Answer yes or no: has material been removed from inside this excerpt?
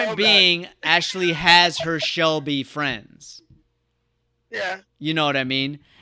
no